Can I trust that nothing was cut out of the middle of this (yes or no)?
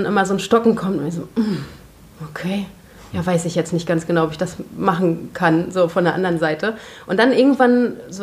yes